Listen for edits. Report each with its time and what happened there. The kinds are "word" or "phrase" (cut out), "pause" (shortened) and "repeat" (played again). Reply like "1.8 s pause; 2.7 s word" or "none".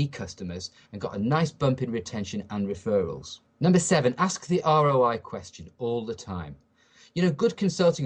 3.5 s pause